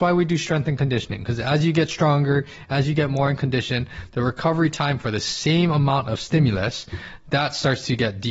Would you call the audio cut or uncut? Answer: uncut